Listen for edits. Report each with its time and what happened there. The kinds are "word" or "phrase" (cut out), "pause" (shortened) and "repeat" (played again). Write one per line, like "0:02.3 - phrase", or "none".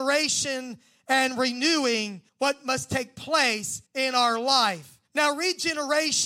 0:02.3 - pause
0:03.9 - pause
0:05.0 - pause